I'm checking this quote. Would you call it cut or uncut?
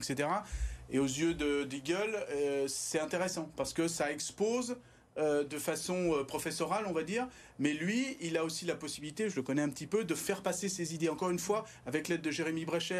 uncut